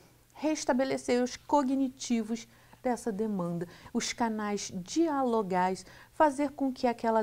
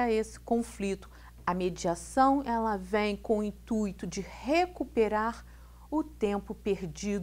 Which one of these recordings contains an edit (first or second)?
first